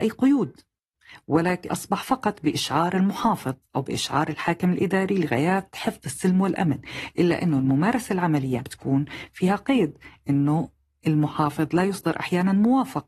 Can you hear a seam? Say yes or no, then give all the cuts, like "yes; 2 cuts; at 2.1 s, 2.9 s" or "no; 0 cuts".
yes; 2 cuts; at 1.7 s, 8.6 s